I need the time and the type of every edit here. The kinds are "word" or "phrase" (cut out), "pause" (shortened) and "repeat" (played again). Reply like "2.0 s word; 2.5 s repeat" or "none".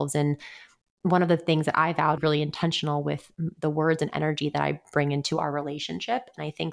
2.2 s phrase